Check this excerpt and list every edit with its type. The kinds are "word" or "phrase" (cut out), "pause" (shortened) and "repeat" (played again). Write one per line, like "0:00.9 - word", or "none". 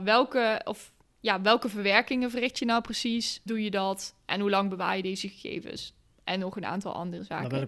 0:03.5 - word